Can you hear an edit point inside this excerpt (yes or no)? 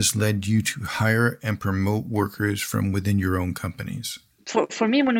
no